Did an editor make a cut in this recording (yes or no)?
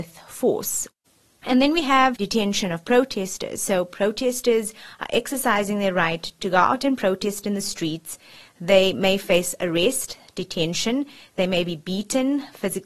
no